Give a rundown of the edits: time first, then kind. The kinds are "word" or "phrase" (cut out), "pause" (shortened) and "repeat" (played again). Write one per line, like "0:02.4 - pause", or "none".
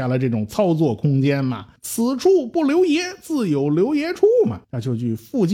0:01.8 - pause
0:04.6 - pause